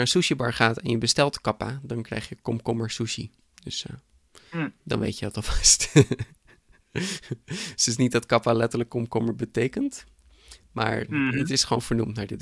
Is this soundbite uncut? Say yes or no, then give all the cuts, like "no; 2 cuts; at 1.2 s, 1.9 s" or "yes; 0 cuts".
yes; 0 cuts